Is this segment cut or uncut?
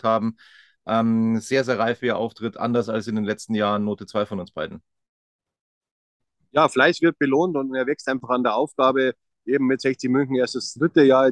uncut